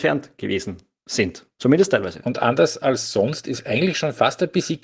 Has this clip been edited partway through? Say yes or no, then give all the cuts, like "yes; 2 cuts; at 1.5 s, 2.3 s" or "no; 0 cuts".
no; 0 cuts